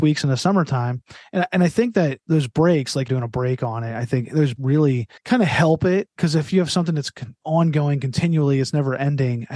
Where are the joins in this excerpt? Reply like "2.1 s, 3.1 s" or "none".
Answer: 2.2 s, 3.1 s, 4.6 s, 5.2 s